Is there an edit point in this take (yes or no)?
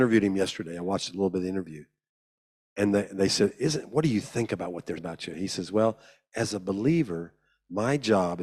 yes